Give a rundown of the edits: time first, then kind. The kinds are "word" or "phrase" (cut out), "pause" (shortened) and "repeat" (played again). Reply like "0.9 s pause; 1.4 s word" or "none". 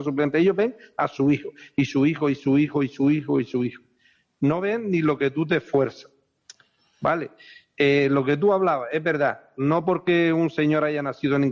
none